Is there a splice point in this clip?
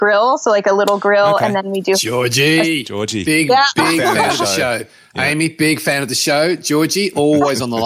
no; 0 cuts

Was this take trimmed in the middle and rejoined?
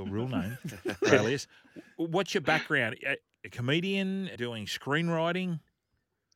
yes; 3 cuts; at 1.1 s, 3.2 s, 4.3 s

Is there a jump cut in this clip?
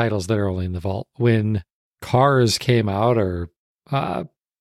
no; 0 cuts

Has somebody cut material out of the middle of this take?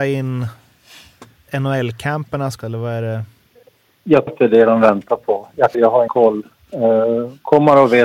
yes; 5 cuts; at 1.5 s, 2.6 s, 4.3 s, 5.7 s, 6.1 s

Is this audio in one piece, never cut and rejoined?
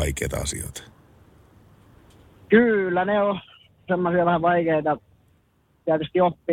yes; 0 cuts

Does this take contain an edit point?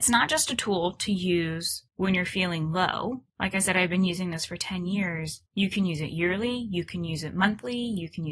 yes; 3 cuts; at 1.9 s, 3.3 s, 5.5 s

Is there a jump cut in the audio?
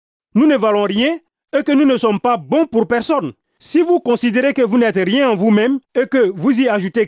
yes; 1 cut; at 5.8 s

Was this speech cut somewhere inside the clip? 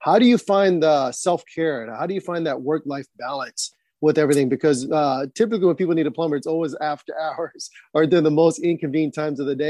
no; 0 cuts

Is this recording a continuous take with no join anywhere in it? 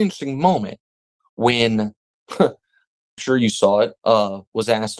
no; 1 cut; at 3.2 s

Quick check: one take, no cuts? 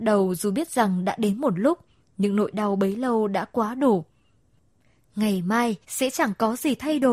no; 1 cut; at 5.8 s

